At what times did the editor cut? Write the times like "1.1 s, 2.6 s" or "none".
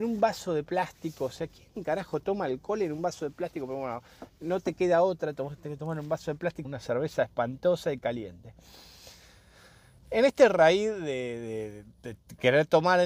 6.6 s